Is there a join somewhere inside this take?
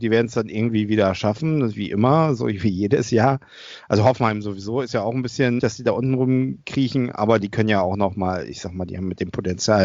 yes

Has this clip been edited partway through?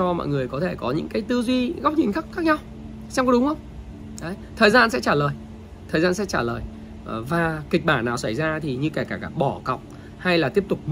no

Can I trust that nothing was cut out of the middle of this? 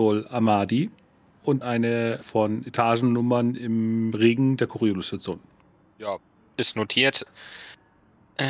no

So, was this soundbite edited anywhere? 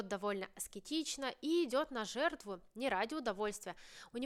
no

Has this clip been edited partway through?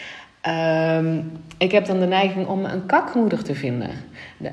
no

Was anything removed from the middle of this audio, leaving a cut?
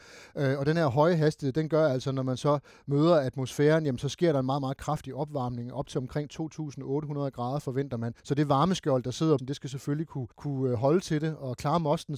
yes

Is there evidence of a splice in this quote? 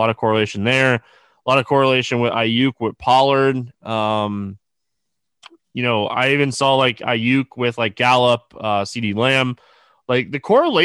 no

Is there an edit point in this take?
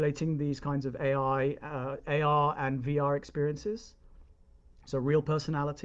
no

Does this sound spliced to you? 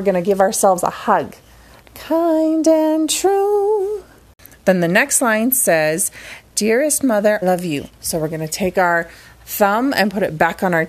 yes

